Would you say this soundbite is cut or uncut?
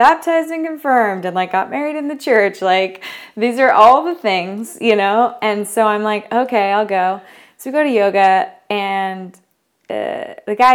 uncut